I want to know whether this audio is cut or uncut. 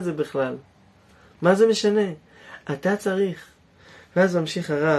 uncut